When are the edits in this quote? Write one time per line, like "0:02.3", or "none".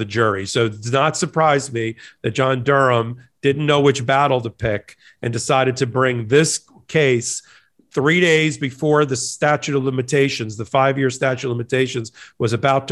none